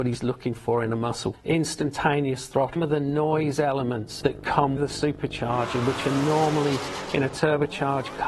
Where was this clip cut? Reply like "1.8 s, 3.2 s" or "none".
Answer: 1.3 s, 2.8 s, 4.2 s, 4.8 s